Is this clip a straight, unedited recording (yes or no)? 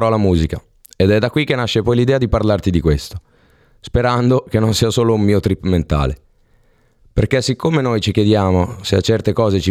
yes